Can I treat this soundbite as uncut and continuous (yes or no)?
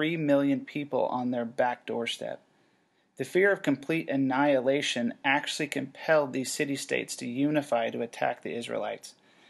yes